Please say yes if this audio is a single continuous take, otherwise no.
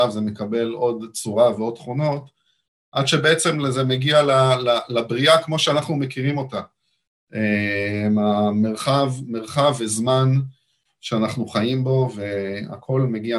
yes